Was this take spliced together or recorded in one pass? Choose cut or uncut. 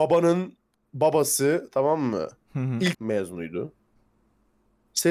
cut